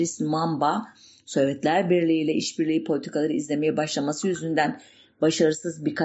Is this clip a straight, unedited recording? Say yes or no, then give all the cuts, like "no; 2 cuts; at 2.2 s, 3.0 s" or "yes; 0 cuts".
yes; 0 cuts